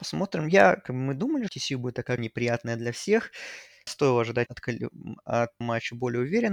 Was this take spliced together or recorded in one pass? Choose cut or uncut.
cut